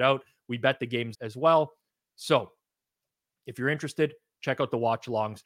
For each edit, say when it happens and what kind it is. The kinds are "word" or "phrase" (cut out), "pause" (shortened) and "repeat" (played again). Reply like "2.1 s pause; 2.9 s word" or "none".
1.1 s word